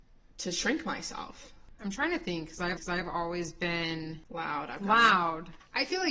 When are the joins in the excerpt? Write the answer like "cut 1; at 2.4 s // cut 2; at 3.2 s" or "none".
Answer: cut 1; at 2.8 s